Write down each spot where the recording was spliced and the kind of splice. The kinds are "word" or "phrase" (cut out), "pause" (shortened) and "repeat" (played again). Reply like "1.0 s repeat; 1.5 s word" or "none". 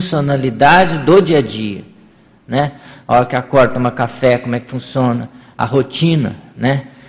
none